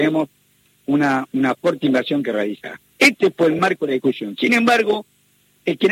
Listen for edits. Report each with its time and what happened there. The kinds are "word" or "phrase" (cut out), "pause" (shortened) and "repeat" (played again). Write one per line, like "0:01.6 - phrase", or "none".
none